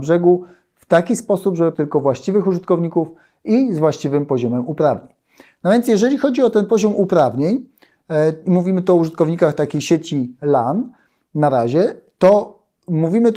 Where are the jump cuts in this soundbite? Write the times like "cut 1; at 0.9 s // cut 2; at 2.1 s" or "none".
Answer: cut 1; at 1.7 s